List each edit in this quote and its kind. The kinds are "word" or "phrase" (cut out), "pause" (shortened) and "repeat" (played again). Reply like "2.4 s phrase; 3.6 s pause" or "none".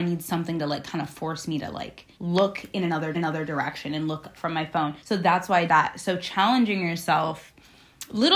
2.1 s pause; 3.1 s repeat; 4.3 s word; 5.0 s pause; 5.7 s word